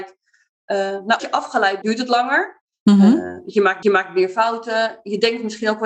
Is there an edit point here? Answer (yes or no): yes